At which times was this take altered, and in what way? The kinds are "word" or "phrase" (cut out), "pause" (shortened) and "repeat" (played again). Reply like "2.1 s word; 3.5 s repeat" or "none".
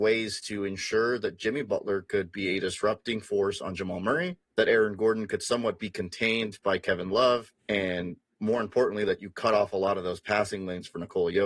4.4 s pause; 7.6 s pause